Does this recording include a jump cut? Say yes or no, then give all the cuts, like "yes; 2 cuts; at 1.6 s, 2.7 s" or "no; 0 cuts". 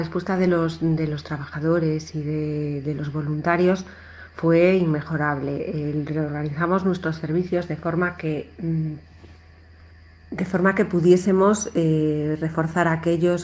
no; 0 cuts